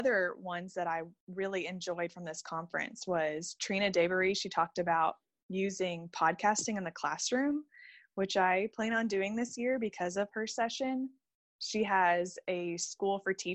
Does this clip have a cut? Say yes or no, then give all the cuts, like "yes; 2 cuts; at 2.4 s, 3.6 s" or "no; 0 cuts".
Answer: no; 0 cuts